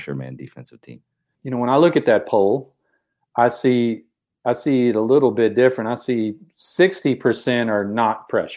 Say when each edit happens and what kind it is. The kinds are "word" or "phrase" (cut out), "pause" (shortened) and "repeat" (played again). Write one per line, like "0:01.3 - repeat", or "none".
none